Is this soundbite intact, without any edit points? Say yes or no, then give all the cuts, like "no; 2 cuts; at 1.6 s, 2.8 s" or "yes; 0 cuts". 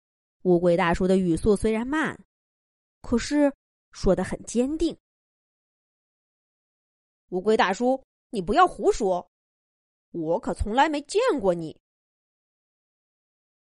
yes; 0 cuts